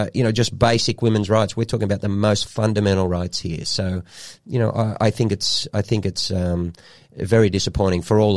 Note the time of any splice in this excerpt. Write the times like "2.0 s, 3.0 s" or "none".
none